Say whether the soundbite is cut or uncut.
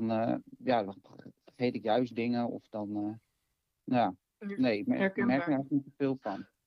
uncut